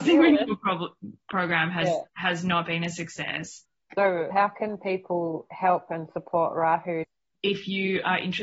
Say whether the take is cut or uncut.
cut